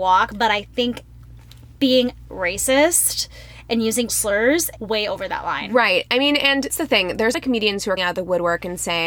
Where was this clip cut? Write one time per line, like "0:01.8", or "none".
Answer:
0:02.3
0:04.1
0:04.8
0:06.7
0:07.3
0:08.0